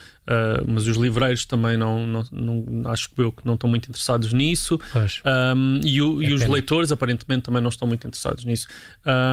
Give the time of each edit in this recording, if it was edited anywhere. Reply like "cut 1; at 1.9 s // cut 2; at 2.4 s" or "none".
none